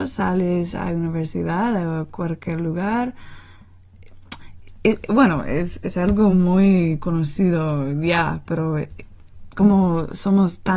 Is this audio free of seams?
yes; 0 cuts

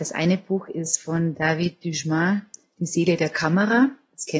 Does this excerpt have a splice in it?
no; 0 cuts

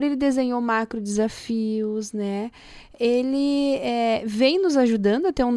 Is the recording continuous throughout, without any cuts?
yes; 0 cuts

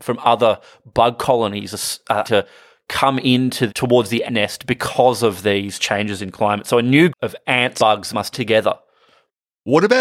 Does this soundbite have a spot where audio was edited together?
yes; 6 cuts; at 2.2 s, 3.7 s, 4.3 s, 7.1 s, 7.8 s, 8.3 s

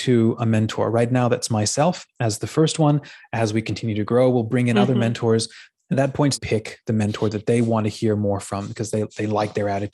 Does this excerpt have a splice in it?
yes; 2 cuts; at 5.9 s, 6.3 s

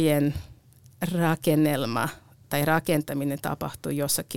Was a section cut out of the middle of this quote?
no; 0 cuts

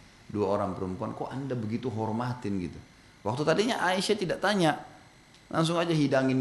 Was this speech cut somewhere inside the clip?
no; 0 cuts

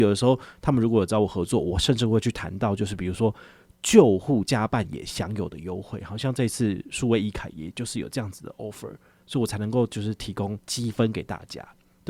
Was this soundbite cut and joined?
no; 0 cuts

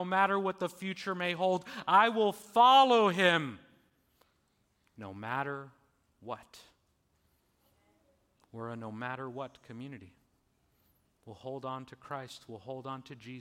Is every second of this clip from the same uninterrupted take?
yes; 0 cuts

